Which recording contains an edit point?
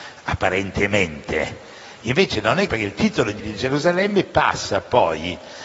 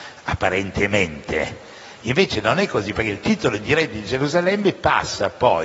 first; 2 cuts; at 2.7 s, 3.4 s

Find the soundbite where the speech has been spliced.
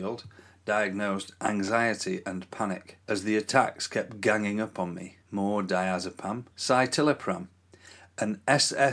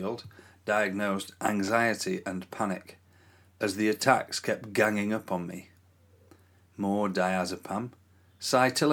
first; 3 cuts; at 3.0 s, 5.2 s, 6.5 s

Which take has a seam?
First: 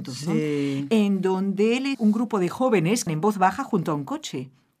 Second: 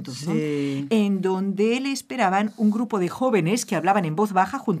first; 2 cuts; at 1.9 s, 3.1 s

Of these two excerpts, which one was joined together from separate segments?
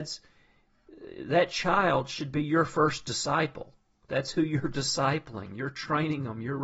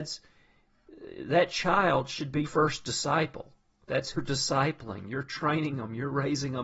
second; 2 cuts; at 2.5 s, 4.1 s

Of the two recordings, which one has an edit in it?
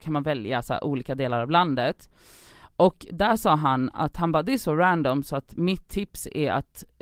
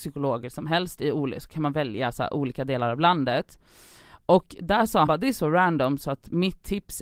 second; 1 cut; at 5.1 s

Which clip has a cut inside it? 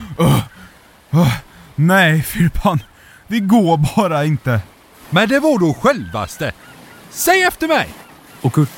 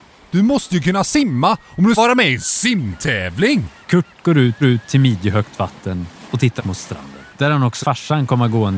second; 6 cuts; at 2.0 s, 3.8 s, 4.6 s, 6.6 s, 7.3 s, 7.8 s

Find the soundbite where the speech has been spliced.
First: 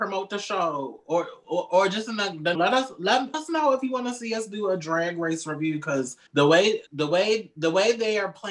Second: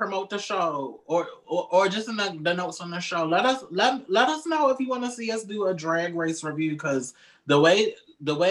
first; 4 cuts; at 2.5 s, 3.3 s, 6.3 s, 6.9 s

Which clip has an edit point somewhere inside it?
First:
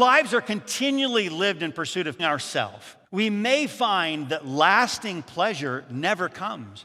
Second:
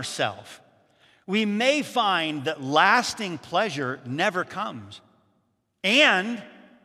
first; 2 cuts; at 2.2 s, 3.0 s

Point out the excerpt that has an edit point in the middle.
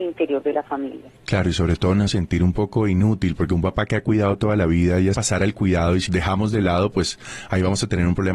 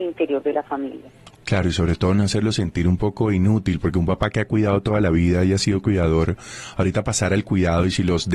first; 4 cuts; at 1.2 s, 2.1 s, 5.1 s, 6.1 s

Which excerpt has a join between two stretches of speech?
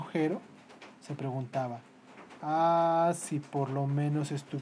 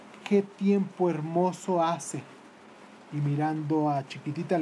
first; 1 cut; at 2.4 s

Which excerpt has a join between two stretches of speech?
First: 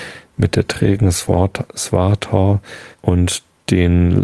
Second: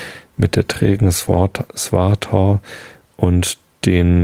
first; 1 cut; at 2.9 s

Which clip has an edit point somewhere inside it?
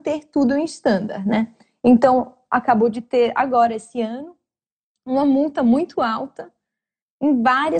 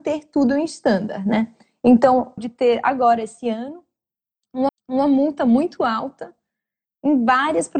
second; 2 cuts; at 2.4 s, 4.7 s

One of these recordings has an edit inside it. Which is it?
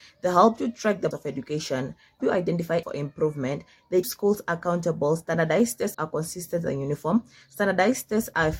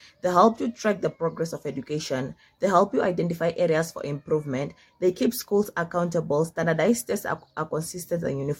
first; 5 cuts; at 1.1 s, 2.2 s, 2.8 s, 4.0 s, 5.9 s

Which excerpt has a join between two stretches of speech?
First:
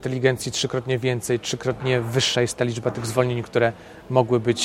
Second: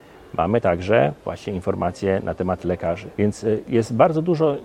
second; 1 cut; at 3.1 s

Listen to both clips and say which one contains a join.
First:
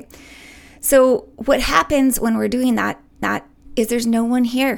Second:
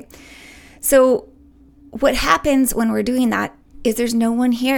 first; 2 cuts; at 1.3 s, 3.2 s

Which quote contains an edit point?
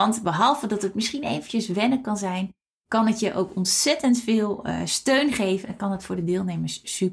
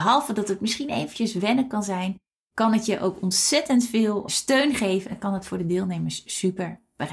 second; 1 cut; at 4.3 s

